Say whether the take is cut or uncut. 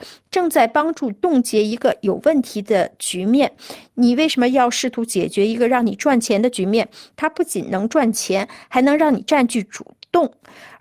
uncut